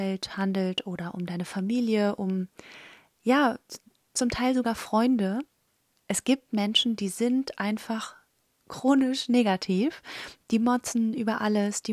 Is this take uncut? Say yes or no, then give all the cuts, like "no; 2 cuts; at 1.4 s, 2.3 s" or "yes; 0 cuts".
yes; 0 cuts